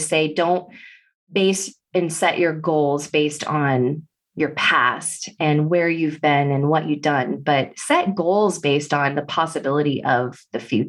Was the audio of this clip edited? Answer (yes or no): no